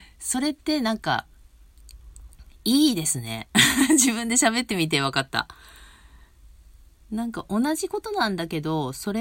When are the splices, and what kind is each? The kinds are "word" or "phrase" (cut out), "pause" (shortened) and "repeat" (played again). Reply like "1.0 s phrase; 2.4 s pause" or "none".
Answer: 3.5 s pause

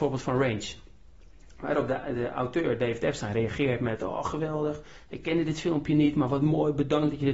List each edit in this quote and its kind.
none

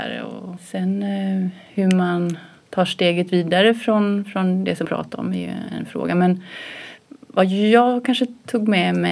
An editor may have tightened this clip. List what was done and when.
4.8 s word

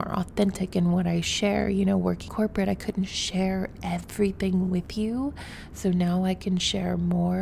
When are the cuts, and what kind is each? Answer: 2.3 s word

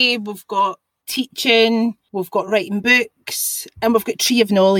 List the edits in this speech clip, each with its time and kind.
none

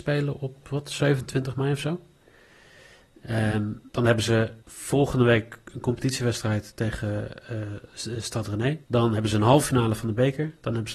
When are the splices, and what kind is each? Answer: 3.9 s pause; 4.6 s pause; 8.8 s pause

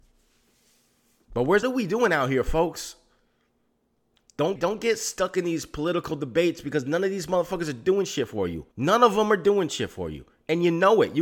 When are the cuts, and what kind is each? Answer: 1.6 s phrase; 4.6 s word; 8.7 s pause

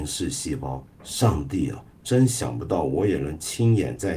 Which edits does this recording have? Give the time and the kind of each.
0.9 s pause; 1.9 s pause

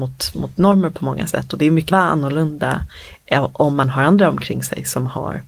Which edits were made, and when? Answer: 1.9 s phrase

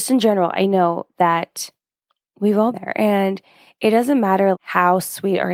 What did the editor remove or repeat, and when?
2.7 s word; 4.5 s word

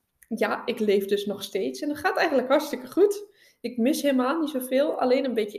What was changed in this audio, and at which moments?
none

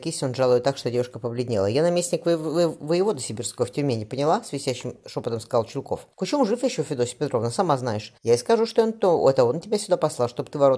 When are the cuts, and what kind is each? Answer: 6.1 s pause; 8.2 s pause

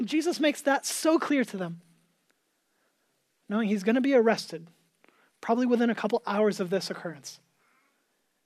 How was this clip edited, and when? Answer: none

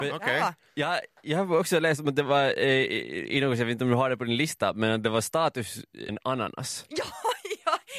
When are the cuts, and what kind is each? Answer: 6.1 s phrase

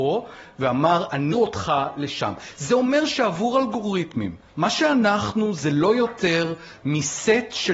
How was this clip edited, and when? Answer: 1.3 s word

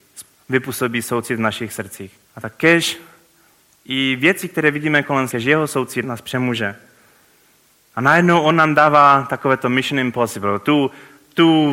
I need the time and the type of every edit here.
2.2 s pause; 5.3 s word; 6.0 s word

